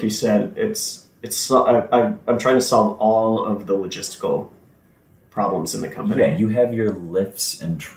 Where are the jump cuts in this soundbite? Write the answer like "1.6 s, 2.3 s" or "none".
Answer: none